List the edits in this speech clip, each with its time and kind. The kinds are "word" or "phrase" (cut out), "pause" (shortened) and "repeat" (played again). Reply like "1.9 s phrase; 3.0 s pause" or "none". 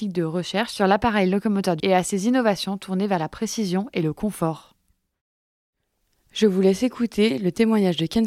1.8 s word